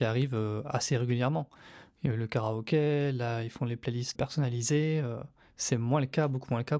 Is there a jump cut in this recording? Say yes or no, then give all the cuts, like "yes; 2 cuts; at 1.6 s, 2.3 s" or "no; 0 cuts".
yes; 1 cut; at 4.1 s